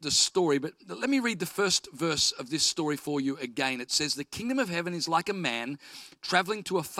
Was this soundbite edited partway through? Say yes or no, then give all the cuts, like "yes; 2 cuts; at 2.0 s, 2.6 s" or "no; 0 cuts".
no; 0 cuts